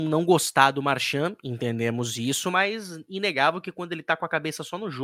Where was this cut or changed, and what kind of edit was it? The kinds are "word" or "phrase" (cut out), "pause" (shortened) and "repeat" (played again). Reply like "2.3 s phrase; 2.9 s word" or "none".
none